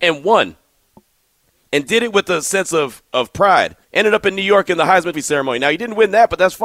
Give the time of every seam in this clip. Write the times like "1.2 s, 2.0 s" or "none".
3.8 s, 5.1 s